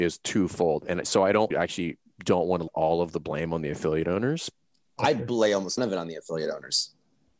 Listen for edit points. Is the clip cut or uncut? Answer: cut